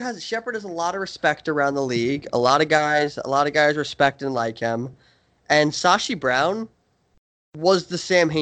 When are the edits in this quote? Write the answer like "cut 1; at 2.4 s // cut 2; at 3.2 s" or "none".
none